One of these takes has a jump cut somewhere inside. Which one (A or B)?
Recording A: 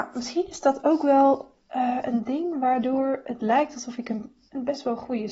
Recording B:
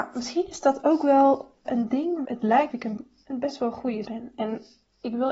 B